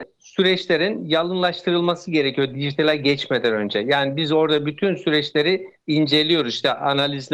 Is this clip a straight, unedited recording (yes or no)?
yes